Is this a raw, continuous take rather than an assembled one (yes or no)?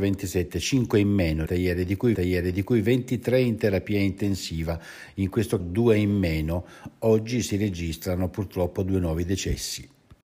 no